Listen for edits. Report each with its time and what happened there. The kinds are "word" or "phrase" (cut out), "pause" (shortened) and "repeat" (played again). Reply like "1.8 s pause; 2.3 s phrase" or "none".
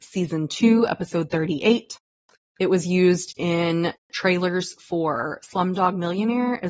none

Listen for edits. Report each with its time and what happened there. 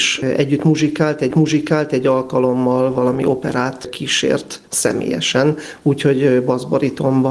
1.3 s repeat

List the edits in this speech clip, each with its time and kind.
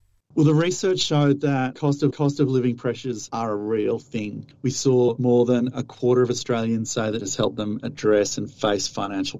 2.1 s repeat; 7.2 s phrase

